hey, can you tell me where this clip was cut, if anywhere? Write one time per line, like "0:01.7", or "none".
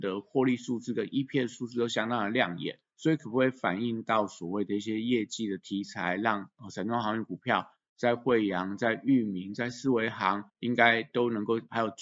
0:02.9
0:10.5

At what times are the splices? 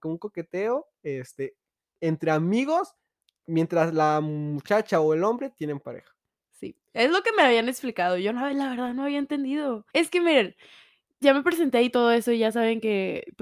0:06.5
0:09.9
0:11.2

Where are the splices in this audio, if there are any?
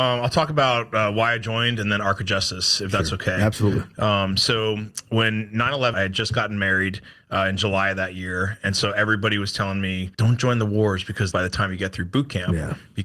0:05.9
0:10.1
0:11.3

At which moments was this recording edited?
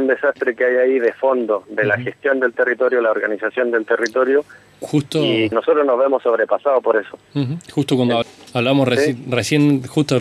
0:05.5
0:08.2

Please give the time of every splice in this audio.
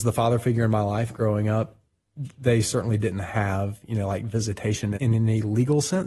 0:04.9

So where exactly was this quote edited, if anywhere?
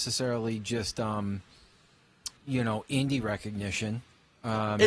0:02.4

